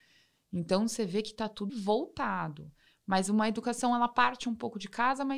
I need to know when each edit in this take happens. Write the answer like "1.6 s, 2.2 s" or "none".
1.7 s